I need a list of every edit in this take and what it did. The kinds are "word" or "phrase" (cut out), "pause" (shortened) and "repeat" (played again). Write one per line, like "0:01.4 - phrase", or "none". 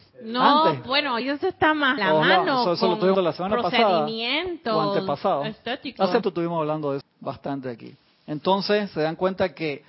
0:01.2 - word
0:02.0 - word
0:03.1 - word
0:06.2 - word
0:07.0 - word